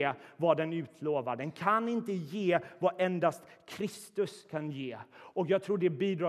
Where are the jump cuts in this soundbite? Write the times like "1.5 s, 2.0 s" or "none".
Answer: none